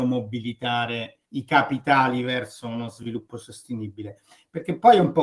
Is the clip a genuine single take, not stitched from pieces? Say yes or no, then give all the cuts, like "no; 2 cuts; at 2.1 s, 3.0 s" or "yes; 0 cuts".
no; 1 cut; at 1.3 s